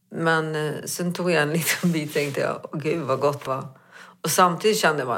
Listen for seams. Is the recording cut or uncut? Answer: cut